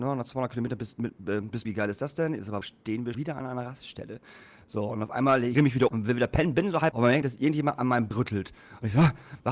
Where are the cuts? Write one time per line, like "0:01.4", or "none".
0:01.6
0:02.6
0:03.1
0:05.5
0:05.9
0:06.9
0:07.2
0:08.1